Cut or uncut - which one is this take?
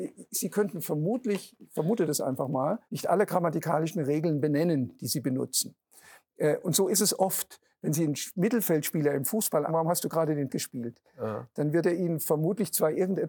cut